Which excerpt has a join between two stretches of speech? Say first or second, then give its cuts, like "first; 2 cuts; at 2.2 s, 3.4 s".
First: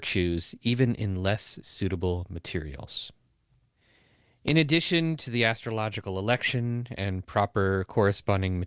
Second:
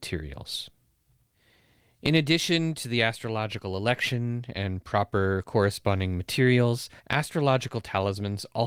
second; 1 cut; at 7.0 s